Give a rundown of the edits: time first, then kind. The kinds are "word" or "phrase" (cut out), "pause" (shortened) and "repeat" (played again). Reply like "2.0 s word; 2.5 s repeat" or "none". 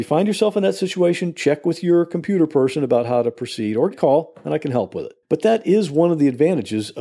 3.9 s phrase; 5.2 s pause